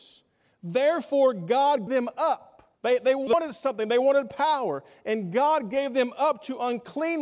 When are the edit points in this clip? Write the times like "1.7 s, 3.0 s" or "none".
1.9 s, 2.7 s